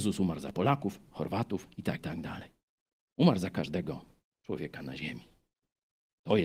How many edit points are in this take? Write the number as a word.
one